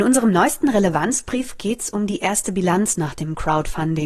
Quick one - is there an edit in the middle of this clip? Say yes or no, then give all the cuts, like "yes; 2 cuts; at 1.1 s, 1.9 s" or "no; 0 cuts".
no; 0 cuts